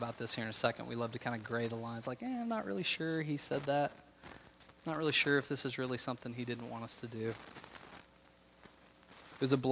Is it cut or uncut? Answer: uncut